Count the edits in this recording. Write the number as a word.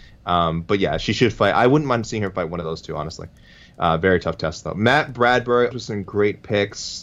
one